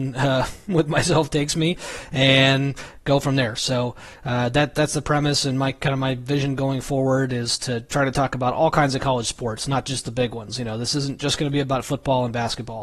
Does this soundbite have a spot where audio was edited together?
no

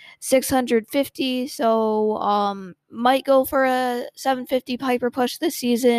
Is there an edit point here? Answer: yes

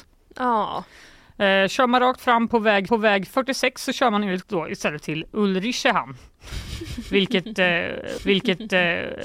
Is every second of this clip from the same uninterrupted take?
no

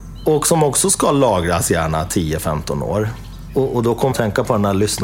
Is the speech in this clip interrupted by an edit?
yes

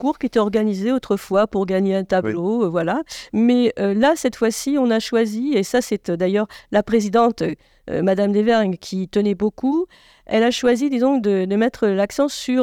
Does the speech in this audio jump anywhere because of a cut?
no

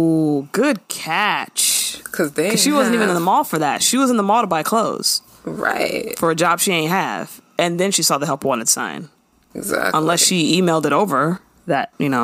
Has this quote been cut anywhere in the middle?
no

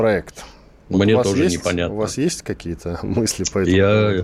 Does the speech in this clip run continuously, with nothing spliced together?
yes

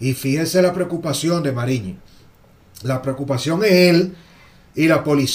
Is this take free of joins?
yes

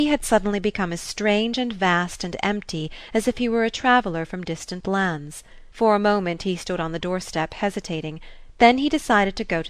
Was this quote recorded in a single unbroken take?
no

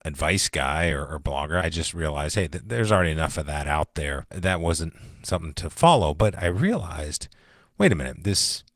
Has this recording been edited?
no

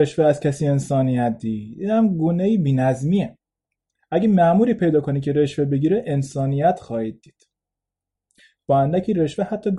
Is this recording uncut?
yes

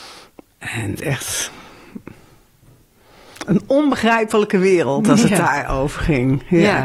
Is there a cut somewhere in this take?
yes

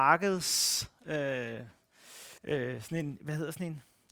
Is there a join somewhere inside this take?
yes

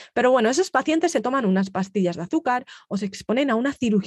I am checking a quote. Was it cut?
no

